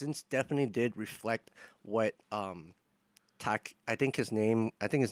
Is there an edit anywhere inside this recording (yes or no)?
no